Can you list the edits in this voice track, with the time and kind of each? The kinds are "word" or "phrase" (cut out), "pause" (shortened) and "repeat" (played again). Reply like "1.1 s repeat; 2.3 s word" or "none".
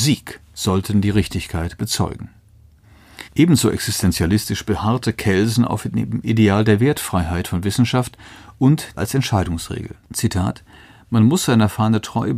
3.3 s pause; 8.9 s phrase; 10.0 s pause

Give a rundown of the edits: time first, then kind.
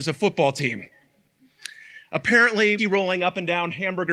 2.8 s word

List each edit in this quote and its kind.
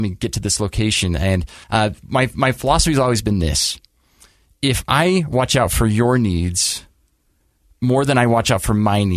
1.6 s pause

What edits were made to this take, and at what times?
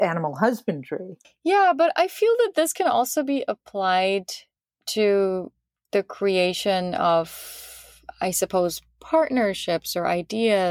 1.2 s pause; 4.6 s pause

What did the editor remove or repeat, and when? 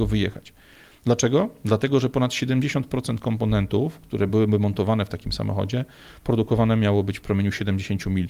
none

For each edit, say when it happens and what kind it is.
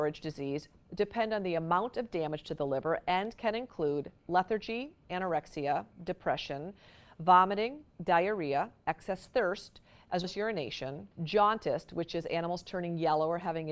8.8 s pause; 10.2 s word; 11.1 s pause

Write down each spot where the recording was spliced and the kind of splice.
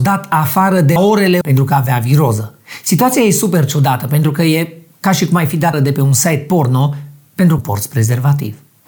1.0 s word; 1.4 s word; 5.7 s word; 7.6 s phrase

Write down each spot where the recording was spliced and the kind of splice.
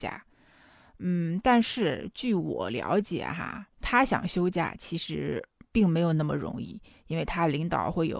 3.7 s pause

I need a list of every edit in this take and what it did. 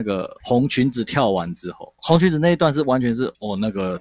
2.0 s pause

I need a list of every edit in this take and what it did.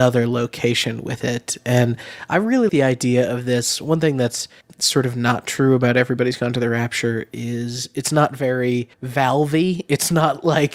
2.7 s word; 4.6 s pause; 8.9 s pause

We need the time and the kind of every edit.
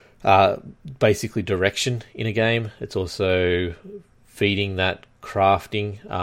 none

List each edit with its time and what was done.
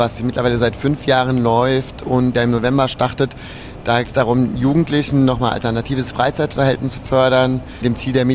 2.3 s phrase; 4.0 s word

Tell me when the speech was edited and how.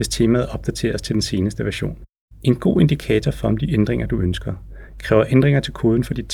2.2 s pause

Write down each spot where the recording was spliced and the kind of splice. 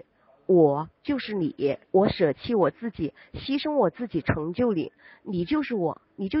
1.8 s pause

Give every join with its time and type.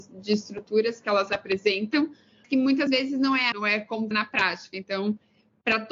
2.4 s word; 2.9 s word; 3.5 s word; 4.1 s word

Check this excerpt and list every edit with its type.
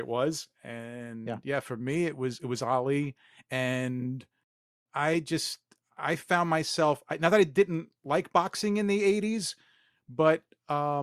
none

